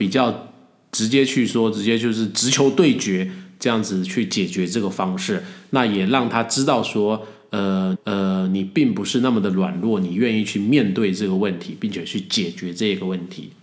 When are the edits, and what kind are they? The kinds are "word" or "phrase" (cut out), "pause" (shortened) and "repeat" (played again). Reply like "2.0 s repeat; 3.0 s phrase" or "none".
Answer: 7.9 s repeat